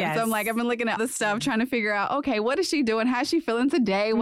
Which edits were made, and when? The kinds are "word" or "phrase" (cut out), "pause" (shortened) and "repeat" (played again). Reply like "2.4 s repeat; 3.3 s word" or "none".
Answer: 1.0 s word